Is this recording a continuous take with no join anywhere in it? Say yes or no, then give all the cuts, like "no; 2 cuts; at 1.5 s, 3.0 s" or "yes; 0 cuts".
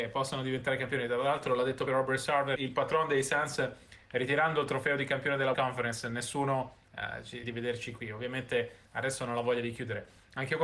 no; 6 cuts; at 1.9 s, 2.6 s, 5.5 s, 6.8 s, 7.4 s, 8.9 s